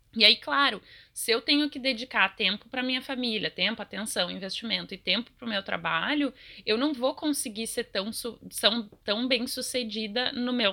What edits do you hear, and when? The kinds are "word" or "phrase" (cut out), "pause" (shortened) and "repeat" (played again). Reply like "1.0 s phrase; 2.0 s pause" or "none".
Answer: none